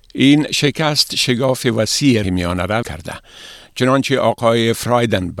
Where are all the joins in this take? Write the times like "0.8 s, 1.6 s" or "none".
2.2 s, 2.8 s